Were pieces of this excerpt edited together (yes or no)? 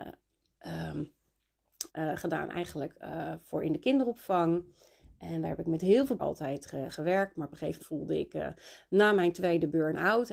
yes